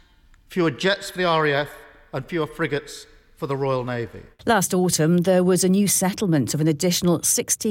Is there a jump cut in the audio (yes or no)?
no